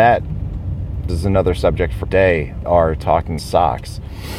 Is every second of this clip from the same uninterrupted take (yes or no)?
no